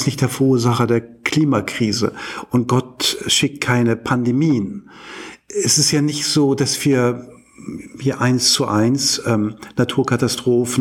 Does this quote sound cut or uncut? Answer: uncut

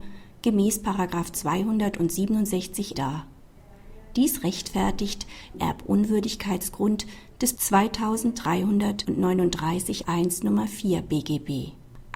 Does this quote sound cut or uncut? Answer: cut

